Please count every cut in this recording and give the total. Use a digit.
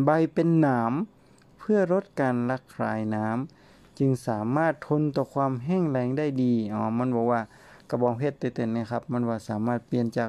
0